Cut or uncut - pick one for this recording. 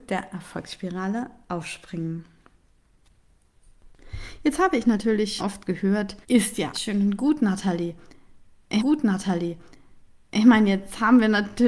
cut